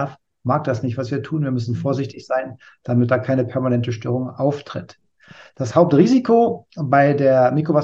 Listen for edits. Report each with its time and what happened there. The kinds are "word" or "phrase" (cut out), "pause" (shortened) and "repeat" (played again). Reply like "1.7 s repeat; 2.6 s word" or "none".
none